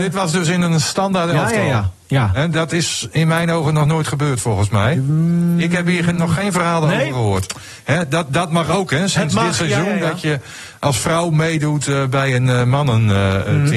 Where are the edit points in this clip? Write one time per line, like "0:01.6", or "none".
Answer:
none